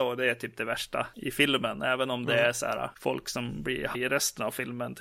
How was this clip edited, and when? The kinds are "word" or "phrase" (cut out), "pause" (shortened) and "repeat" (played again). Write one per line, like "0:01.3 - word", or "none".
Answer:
0:03.9 - word